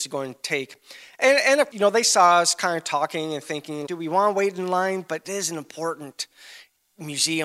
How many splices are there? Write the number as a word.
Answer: three